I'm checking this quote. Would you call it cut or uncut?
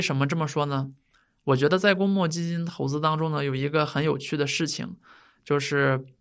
uncut